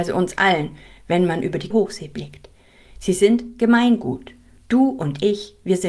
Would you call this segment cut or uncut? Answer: cut